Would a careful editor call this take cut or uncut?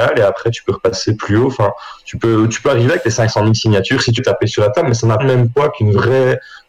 cut